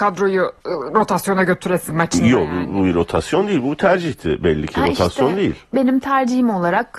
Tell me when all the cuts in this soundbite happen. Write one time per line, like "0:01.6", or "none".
0:01.9